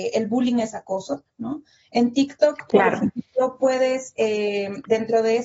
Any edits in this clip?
no; 0 cuts

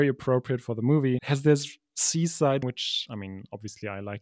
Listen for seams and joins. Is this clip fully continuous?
no; 2 cuts; at 1.2 s, 2.6 s

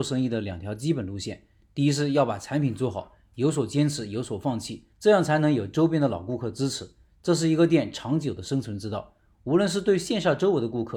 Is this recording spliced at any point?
yes; 1 cut; at 4.9 s

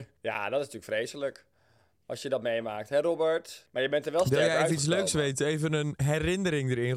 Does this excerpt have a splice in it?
no; 0 cuts

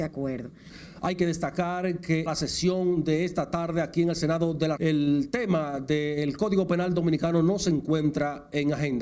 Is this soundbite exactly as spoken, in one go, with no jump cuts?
no; 2 cuts; at 2.3 s, 4.8 s

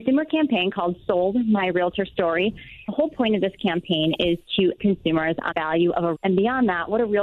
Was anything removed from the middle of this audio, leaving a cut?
yes; 4 cuts; at 2.9 s, 4.8 s, 5.5 s, 6.1 s

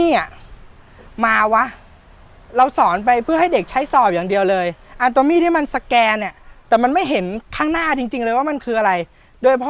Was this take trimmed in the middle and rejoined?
yes; 1 cut; at 2.0 s

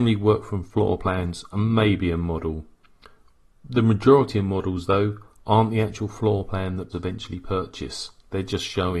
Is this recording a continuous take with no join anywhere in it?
no; 1 cut; at 6.9 s

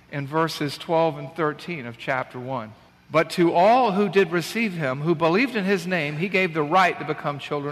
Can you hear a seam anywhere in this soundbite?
no; 0 cuts

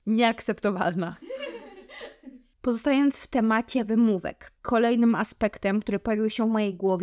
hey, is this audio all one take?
yes; 0 cuts

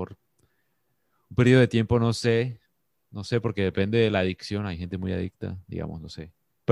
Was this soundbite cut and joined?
no; 0 cuts

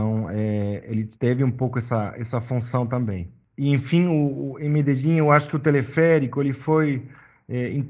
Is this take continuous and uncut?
no; 1 cut; at 1.1 s

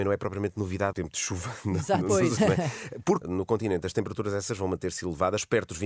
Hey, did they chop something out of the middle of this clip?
yes; 3 cuts; at 0.9 s, 2.4 s, 3.2 s

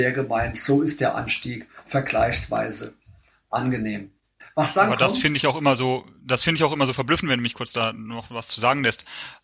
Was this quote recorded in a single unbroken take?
no; 1 cut; at 4.4 s

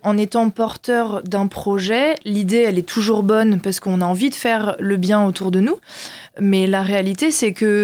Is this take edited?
no; 0 cuts

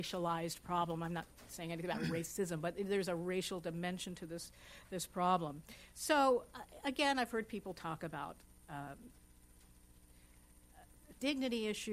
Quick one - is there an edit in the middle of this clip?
no; 0 cuts

